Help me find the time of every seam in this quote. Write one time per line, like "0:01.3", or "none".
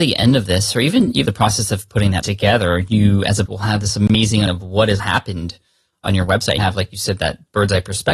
0:01.3
0:02.2
0:03.5
0:04.5
0:05.0
0:06.6